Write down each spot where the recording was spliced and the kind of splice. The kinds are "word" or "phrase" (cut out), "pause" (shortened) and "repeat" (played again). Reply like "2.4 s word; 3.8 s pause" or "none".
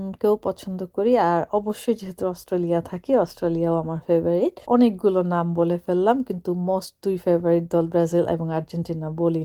4.6 s pause